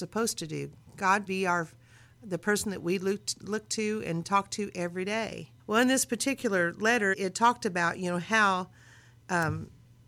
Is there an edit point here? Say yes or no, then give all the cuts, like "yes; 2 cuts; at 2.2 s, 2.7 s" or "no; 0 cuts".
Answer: yes; 3 cuts; at 1.3 s, 5.6 s, 7.1 s